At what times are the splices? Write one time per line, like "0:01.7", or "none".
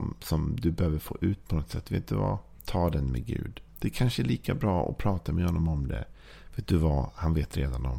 0:02.6
0:03.7